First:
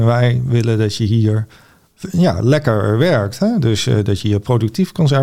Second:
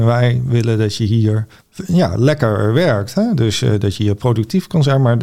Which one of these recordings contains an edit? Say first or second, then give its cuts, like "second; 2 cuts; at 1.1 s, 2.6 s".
second; 1 cut; at 1.6 s